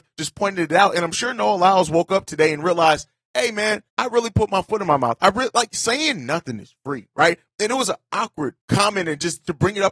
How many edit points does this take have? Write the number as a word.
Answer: two